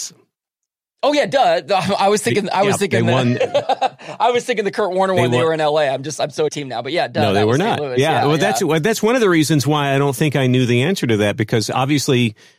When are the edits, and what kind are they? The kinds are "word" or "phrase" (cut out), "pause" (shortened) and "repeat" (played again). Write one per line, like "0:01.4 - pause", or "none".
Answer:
0:06.5 - phrase

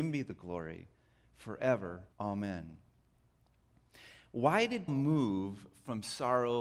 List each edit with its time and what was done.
0:02.1 - pause
0:04.9 - word

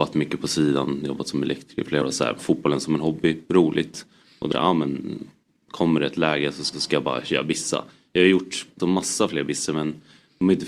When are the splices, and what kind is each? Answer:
0:02.0 - word
0:02.4 - word
0:04.5 - phrase
0:06.7 - repeat
0:08.8 - word

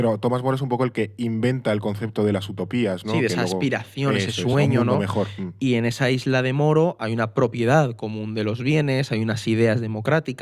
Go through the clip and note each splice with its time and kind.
none

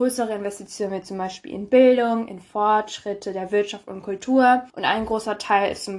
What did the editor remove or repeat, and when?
0:04.7 - pause

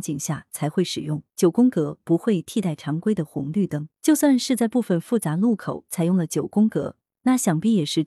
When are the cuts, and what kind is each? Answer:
0:01.3 - pause
0:03.9 - pause

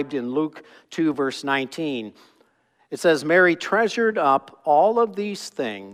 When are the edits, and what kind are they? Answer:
none

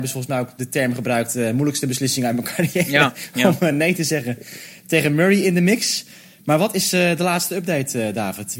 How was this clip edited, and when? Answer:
none

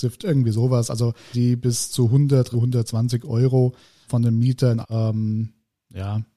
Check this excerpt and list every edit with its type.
0:01.3 - word
0:02.5 - word
0:04.1 - word
0:04.8 - word

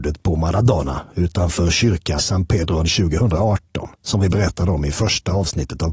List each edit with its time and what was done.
0:02.2 - word
0:02.8 - phrase
0:03.9 - pause

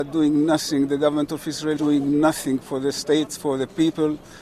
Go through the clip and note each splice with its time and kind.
0:01.8 - word
0:03.3 - word

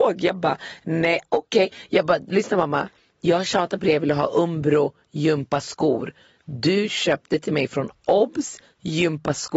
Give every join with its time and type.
none

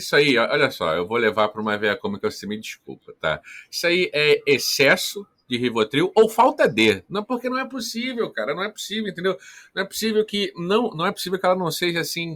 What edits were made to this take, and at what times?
none

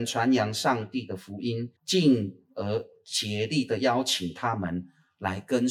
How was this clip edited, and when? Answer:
0:01.8 - pause

